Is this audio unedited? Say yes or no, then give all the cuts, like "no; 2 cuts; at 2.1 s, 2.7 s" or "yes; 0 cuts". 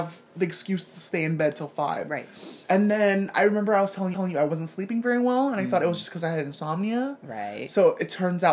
no; 2 cuts; at 2.6 s, 4.1 s